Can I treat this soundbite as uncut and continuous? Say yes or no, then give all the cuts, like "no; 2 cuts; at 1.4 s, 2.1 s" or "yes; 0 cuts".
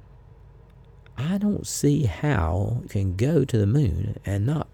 no; 1 cut; at 2.9 s